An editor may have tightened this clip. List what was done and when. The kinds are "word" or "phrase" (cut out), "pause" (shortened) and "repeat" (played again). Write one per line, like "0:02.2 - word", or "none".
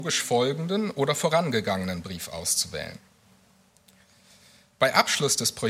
none

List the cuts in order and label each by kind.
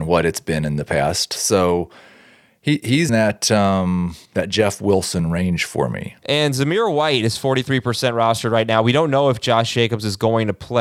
0:03.1 - word
0:04.2 - pause
0:06.2 - pause

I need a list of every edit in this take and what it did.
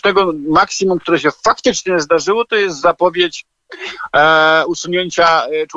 none

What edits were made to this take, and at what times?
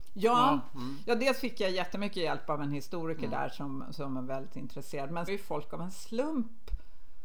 0:05.3 - phrase

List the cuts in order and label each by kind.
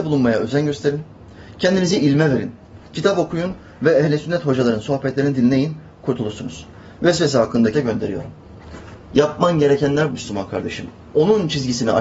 0:07.7 - word
0:10.1 - word

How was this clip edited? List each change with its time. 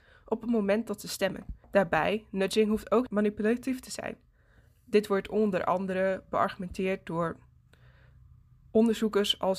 0:01.6 - pause
0:03.1 - phrase

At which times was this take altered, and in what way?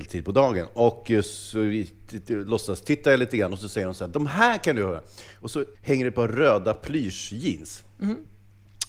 0:05.7 - pause

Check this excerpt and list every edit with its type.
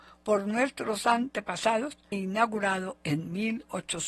0:02.1 - word

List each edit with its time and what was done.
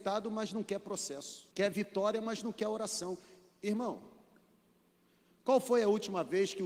0:01.5 - pause

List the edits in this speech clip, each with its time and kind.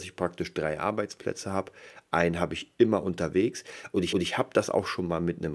0:04.1 - repeat

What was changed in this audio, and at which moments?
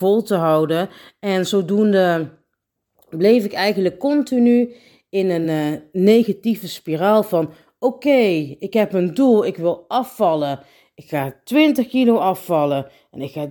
none

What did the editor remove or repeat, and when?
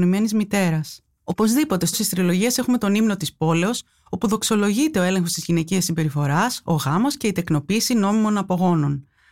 0:01.9 - word

